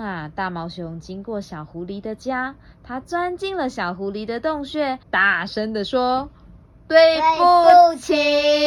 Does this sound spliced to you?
yes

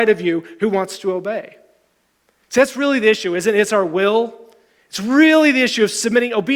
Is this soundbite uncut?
yes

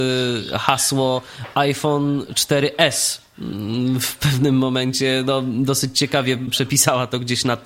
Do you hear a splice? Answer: no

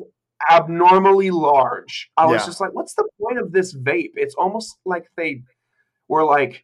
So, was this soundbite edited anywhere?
yes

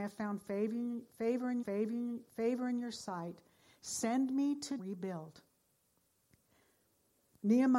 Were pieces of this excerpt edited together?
yes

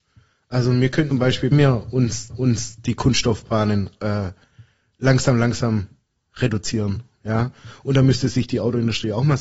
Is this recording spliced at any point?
yes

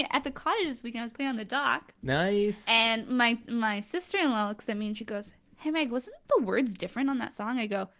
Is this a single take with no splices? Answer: yes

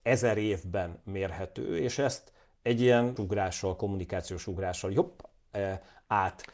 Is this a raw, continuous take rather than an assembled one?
no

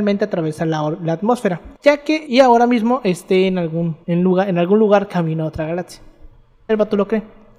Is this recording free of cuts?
no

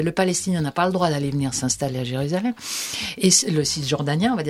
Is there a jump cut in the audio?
no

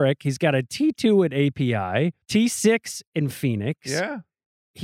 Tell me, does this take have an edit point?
yes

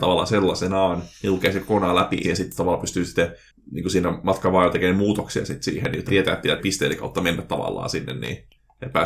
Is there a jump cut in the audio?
yes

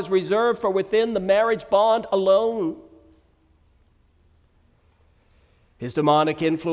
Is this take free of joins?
yes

